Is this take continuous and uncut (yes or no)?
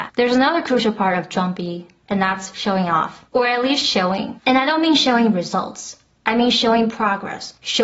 no